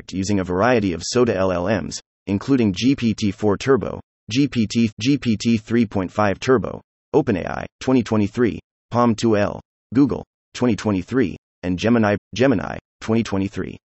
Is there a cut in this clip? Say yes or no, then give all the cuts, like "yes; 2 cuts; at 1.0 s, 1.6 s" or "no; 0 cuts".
yes; 3 cuts; at 4.9 s, 7.7 s, 12.2 s